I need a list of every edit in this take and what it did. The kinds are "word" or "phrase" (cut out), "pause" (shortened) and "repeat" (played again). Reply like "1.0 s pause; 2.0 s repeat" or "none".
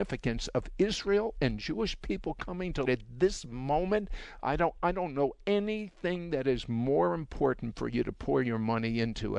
2.9 s word